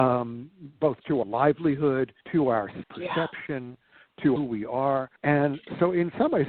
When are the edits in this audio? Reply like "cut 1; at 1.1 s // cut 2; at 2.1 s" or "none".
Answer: cut 1; at 1.2 s // cut 2; at 2.2 s // cut 3; at 2.8 s // cut 4; at 4.4 s // cut 5; at 5.2 s

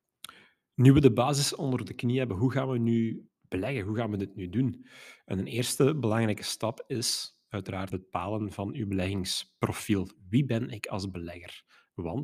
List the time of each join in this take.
cut 1; at 3.3 s // cut 2; at 7.9 s

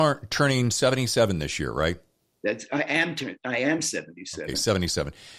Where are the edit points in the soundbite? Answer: none

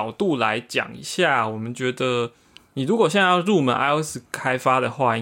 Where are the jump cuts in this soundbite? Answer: none

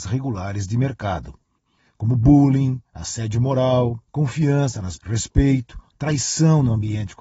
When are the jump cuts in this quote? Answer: cut 1; at 4.1 s // cut 2; at 5.0 s // cut 3; at 5.9 s

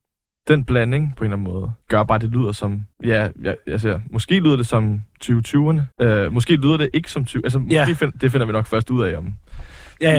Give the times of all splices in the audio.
cut 1; at 1.8 s // cut 2; at 2.9 s // cut 3; at 5.9 s

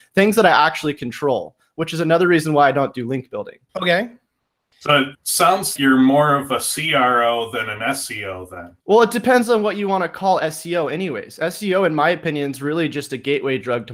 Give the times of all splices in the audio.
cut 1; at 3.7 s // cut 2; at 5.1 s // cut 3; at 5.8 s // cut 4; at 8.8 s

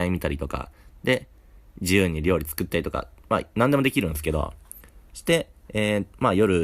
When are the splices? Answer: none

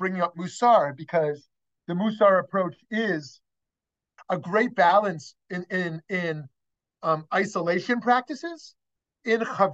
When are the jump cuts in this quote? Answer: cut 1; at 4.2 s

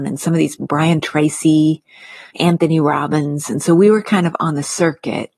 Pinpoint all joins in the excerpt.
cut 1; at 2.3 s

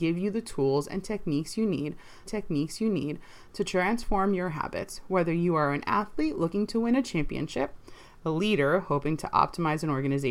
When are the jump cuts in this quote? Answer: cut 1; at 2.3 s

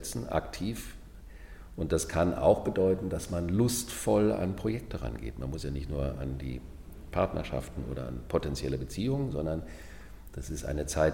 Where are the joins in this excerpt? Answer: none

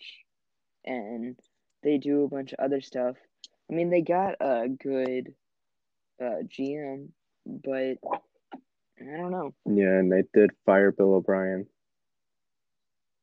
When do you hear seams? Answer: none

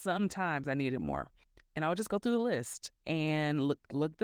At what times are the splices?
cut 1; at 1.4 s

